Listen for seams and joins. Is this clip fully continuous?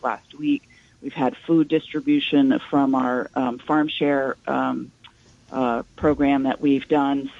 yes; 0 cuts

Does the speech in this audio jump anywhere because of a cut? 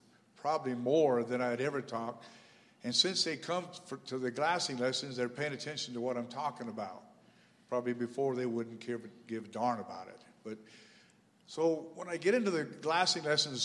no; 0 cuts

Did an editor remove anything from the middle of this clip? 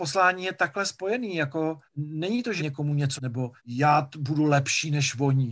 yes; 4 cuts; at 1.9 s, 2.6 s, 3.2 s, 3.6 s

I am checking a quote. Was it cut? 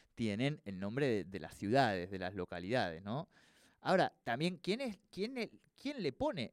no; 0 cuts

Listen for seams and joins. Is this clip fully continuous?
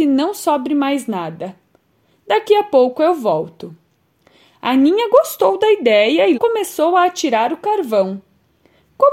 no; 1 cut; at 6.3 s

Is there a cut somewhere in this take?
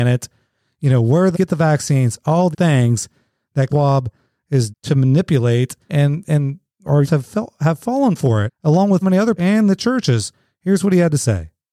yes; 9 cuts; at 1.3 s, 2.5 s, 3.7 s, 4.7 s, 5.9 s, 7.0 s, 8.5 s, 9.0 s, 9.4 s

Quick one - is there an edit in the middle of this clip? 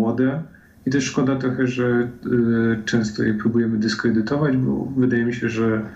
no; 0 cuts

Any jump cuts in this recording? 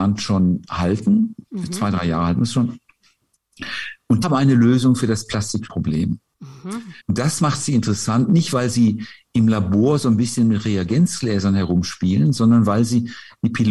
yes; 4 cuts; at 1.4 s, 4.2 s, 5.7 s, 7.0 s

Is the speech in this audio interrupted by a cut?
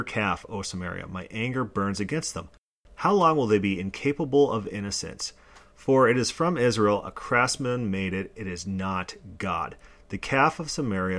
no; 0 cuts

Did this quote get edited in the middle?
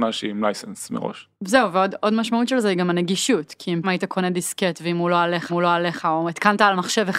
yes; 3 cuts; at 1.3 s, 3.8 s, 5.5 s

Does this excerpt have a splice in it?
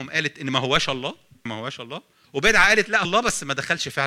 yes; 3 cuts; at 1.5 s, 2.2 s, 3.0 s

